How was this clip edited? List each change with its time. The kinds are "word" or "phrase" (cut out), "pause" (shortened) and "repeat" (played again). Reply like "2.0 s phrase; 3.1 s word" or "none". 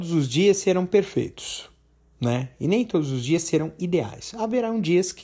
none